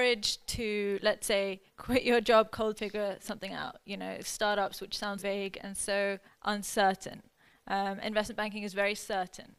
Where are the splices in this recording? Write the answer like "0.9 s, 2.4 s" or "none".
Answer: 1.7 s, 2.8 s, 4.2 s, 5.2 s, 6.3 s